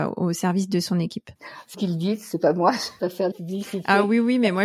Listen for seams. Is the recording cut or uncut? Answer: cut